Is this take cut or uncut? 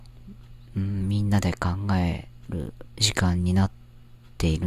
cut